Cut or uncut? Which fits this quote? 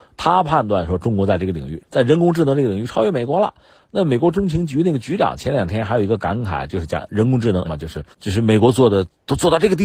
cut